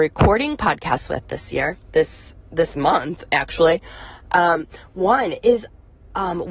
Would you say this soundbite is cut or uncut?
cut